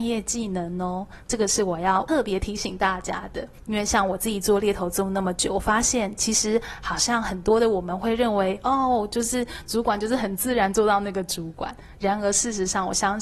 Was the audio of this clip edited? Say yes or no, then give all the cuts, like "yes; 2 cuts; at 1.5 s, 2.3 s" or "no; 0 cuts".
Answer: no; 0 cuts